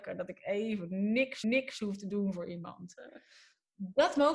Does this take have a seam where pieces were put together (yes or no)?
yes